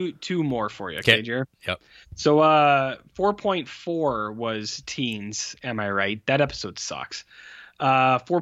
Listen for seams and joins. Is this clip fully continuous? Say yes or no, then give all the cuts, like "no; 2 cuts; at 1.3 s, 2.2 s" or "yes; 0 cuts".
yes; 0 cuts